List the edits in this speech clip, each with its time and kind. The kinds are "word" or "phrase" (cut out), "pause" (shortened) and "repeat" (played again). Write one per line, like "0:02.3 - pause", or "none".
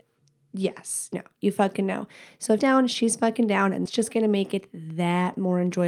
0:01.1 - word
0:02.6 - word
0:03.9 - word